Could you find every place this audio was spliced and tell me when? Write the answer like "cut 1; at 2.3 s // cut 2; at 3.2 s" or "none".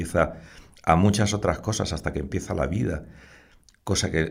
none